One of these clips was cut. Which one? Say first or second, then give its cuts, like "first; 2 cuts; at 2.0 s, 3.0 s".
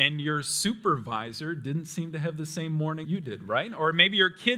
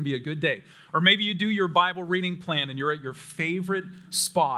first; 1 cut; at 3.0 s